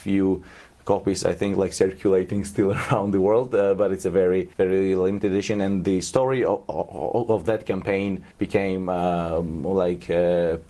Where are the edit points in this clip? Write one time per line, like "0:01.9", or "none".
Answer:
0:04.5
0:08.3